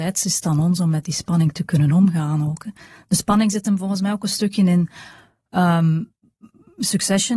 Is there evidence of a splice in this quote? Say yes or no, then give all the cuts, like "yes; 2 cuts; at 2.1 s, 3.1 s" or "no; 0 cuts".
no; 0 cuts